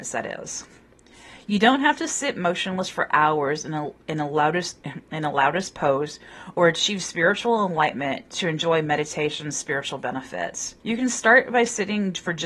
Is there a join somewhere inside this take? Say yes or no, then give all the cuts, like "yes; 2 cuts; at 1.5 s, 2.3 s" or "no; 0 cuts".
yes; 1 cut; at 10.8 s